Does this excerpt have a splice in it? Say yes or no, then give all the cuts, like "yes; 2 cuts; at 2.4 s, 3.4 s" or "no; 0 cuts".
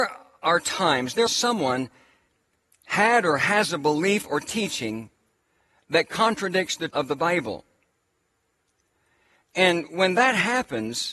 yes; 2 cuts; at 1.3 s, 6.9 s